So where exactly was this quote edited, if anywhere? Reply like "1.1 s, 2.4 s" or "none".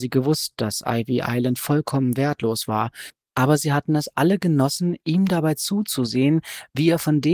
none